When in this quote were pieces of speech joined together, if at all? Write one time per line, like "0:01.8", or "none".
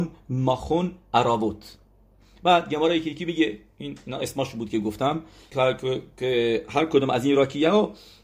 0:05.5